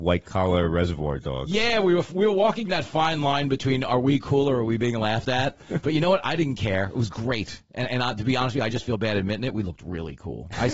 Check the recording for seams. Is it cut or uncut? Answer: uncut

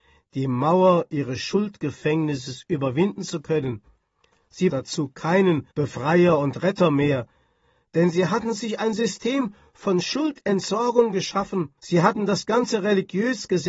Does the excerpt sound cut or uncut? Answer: cut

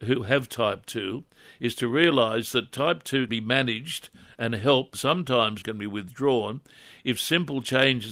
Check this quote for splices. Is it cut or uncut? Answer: cut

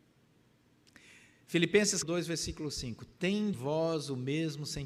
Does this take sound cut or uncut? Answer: cut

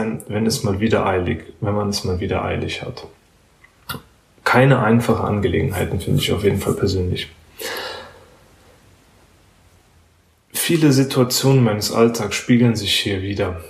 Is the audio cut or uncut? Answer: uncut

